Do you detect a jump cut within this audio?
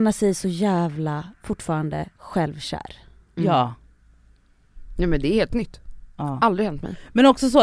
yes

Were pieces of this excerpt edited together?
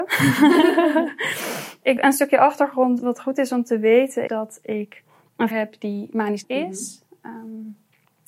yes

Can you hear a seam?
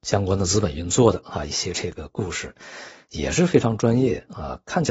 no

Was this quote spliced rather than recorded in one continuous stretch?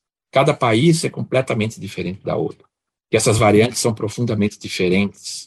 no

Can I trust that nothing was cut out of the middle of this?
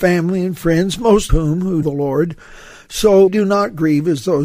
no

